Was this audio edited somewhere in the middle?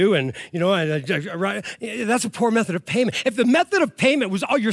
no; 0 cuts

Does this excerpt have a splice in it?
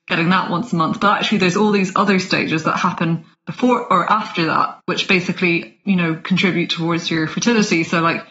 yes; 2 cuts; at 3.3 s, 4.8 s

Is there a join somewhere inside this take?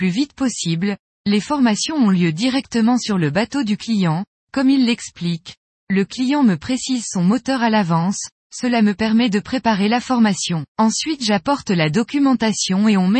yes; 1 cut; at 10.7 s

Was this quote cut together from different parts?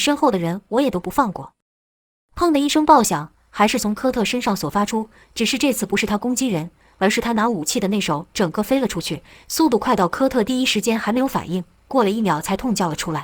no; 0 cuts

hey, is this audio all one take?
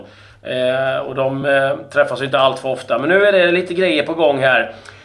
yes; 0 cuts

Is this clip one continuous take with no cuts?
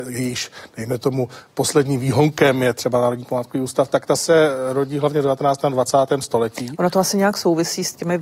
yes; 0 cuts

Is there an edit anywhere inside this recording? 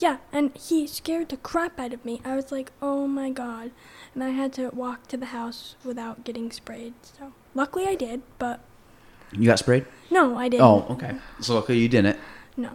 no; 0 cuts

